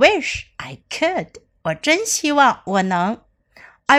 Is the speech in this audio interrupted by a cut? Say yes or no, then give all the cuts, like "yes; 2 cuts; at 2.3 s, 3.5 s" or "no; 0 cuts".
no; 0 cuts